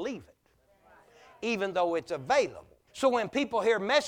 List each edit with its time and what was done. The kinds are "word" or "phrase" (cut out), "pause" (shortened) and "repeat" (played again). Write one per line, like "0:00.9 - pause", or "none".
0:02.9 - pause